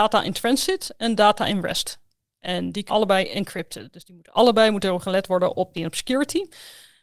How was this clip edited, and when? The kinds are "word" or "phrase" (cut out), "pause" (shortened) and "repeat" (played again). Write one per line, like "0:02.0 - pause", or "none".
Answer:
0:02.9 - word
0:05.7 - word